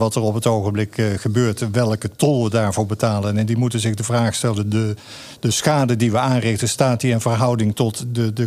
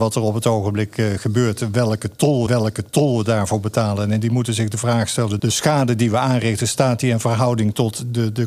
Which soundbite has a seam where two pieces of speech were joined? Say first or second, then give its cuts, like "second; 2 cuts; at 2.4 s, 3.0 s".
second; 2 cuts; at 2.5 s, 5.4 s